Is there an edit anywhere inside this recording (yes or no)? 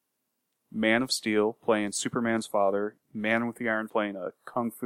yes